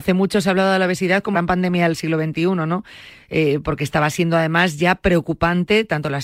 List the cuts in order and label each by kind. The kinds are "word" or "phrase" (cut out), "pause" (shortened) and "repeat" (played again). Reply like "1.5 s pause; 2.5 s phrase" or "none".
1.3 s word